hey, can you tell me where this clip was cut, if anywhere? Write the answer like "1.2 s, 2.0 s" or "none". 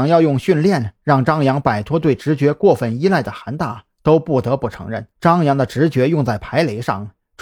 5.1 s